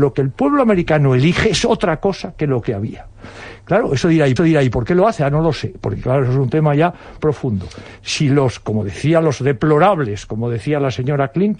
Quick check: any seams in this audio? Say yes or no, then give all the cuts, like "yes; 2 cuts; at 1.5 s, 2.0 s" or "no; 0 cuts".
yes; 2 cuts; at 4.4 s, 7.2 s